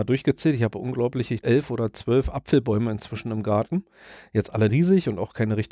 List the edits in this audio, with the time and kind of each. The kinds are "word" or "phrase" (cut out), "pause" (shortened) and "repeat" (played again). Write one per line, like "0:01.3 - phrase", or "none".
0:01.4 - word
0:04.7 - word